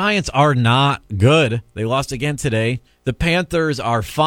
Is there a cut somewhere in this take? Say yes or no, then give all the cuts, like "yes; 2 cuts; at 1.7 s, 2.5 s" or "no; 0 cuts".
yes; 1 cut; at 2.9 s